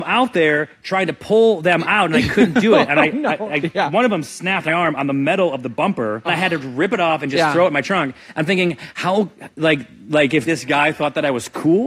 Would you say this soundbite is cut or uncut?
cut